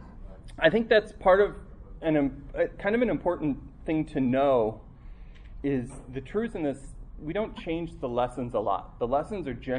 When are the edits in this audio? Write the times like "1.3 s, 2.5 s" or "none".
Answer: none